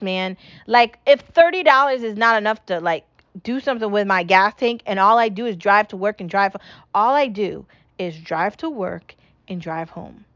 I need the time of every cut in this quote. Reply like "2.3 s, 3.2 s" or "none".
none